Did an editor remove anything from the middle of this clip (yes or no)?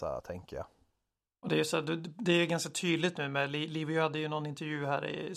no